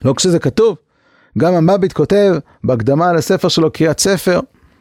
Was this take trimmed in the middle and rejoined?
no; 0 cuts

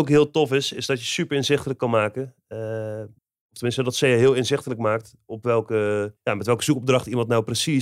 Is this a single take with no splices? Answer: no; 2 cuts; at 3.2 s, 6.2 s

